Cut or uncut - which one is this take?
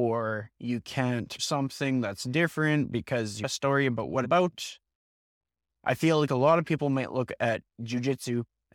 cut